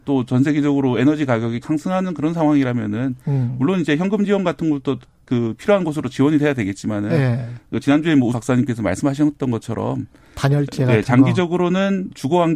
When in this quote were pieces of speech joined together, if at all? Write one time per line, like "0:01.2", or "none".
0:01.6
0:08.3